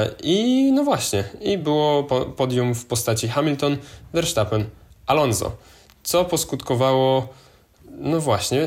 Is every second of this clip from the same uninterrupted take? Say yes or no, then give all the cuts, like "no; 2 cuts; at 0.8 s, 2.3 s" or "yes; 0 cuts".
yes; 0 cuts